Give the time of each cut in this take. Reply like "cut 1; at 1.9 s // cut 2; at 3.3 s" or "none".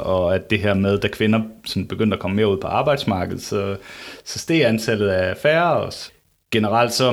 none